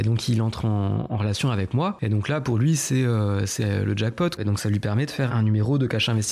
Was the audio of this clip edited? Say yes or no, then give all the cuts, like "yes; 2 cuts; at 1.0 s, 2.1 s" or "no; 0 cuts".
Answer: no; 0 cuts